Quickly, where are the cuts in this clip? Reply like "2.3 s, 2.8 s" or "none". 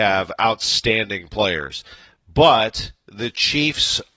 none